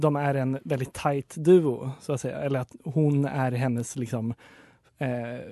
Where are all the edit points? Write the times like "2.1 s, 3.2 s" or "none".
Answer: none